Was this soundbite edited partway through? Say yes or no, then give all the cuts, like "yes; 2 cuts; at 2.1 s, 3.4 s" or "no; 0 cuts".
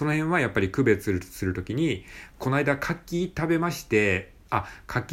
yes; 1 cut; at 2.3 s